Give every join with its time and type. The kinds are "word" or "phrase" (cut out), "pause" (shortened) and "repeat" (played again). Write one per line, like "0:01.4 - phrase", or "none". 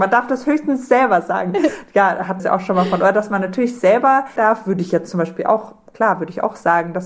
0:02.4 - word
0:04.4 - word